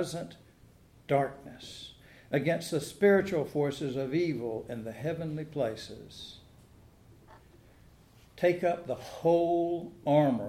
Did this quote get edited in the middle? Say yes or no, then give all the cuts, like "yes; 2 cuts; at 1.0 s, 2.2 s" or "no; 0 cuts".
no; 0 cuts